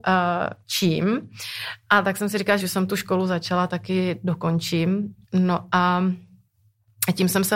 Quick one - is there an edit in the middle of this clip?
yes; 3 cuts; at 2.6 s, 3.7 s, 5.2 s

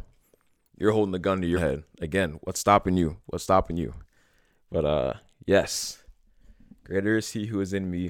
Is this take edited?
yes; 1 cut; at 1.5 s

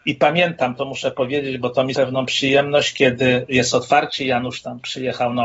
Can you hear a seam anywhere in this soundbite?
yes; 1 cut; at 1.9 s

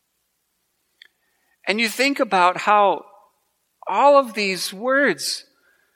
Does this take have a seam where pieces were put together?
no; 0 cuts

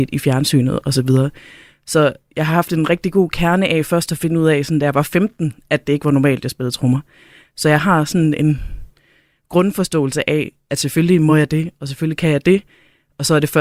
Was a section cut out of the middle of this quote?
no; 0 cuts

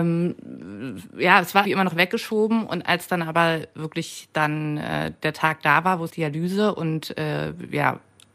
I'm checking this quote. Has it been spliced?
yes; 2 cuts; at 1.6 s, 6.1 s

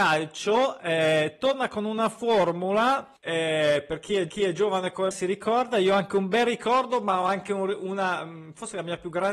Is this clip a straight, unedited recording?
no; 3 cuts; at 3.2 s, 4.3 s, 5.1 s

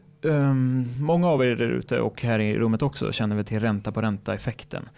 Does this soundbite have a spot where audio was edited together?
no; 0 cuts

